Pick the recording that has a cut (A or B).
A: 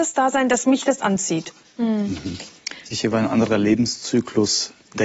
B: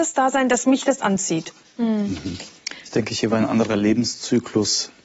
A